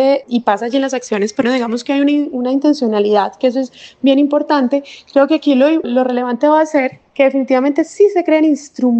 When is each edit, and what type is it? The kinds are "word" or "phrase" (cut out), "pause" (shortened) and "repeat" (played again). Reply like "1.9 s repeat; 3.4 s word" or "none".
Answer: 1.4 s word